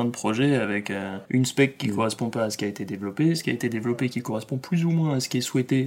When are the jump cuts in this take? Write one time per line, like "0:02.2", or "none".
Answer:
0:01.3